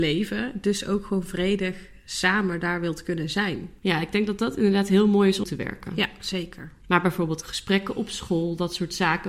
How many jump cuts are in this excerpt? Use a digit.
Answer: 3